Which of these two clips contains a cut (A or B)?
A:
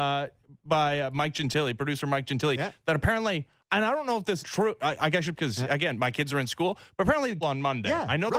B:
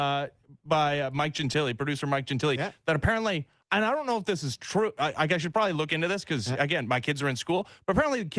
A